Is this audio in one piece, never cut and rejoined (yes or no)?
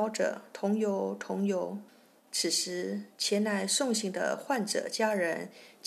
no